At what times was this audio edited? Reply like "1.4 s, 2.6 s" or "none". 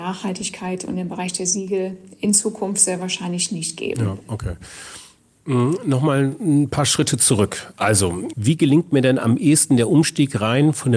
8.3 s